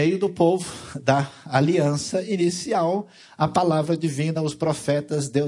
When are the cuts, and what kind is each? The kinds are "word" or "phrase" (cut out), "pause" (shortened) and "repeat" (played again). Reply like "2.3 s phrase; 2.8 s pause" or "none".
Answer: none